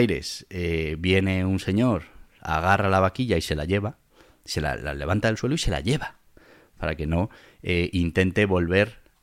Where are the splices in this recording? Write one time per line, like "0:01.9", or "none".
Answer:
none